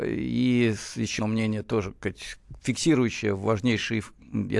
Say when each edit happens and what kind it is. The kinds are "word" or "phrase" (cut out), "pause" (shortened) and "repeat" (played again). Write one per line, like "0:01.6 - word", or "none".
0:01.2 - word
0:02.6 - pause